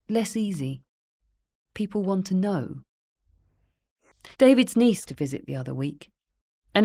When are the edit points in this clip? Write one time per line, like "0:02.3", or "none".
0:04.3
0:05.1